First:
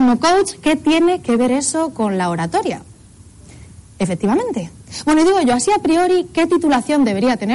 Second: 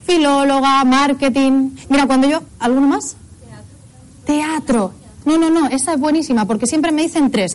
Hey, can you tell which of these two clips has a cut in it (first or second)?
second